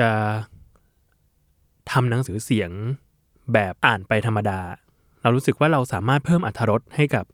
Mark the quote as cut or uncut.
cut